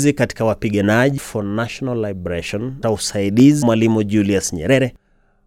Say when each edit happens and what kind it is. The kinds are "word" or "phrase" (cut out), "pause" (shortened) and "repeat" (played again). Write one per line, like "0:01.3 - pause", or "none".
0:01.2 - phrase
0:02.8 - word
0:03.6 - word